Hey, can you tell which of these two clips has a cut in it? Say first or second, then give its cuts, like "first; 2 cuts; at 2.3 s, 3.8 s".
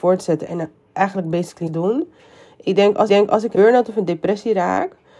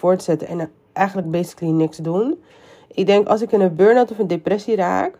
first; 3 cuts; at 1.7 s, 3.1 s, 3.5 s